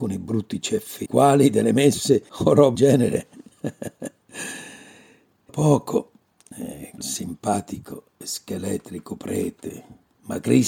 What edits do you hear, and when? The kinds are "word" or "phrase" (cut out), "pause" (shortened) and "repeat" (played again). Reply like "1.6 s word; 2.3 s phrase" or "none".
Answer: 1.1 s word; 2.3 s pause; 2.7 s word; 5.5 s word; 6.3 s pause; 7.0 s word